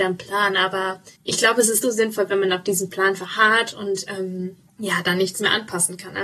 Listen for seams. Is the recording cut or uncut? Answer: cut